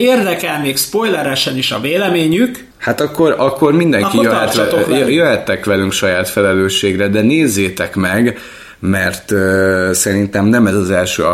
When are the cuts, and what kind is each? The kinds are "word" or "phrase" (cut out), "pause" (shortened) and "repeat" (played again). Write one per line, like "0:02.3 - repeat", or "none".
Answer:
0:02.7 - pause

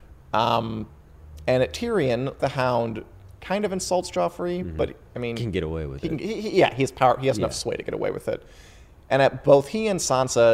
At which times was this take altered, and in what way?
0:02.4 - word

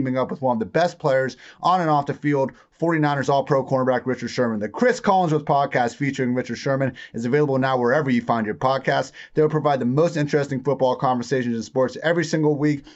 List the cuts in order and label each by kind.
none

